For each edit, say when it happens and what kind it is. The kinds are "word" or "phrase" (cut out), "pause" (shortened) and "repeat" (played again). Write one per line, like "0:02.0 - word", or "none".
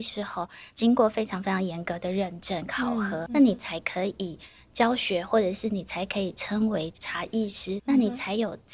0:03.3 - word
0:07.8 - word